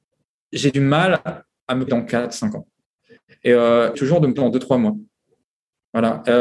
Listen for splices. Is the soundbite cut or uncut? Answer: cut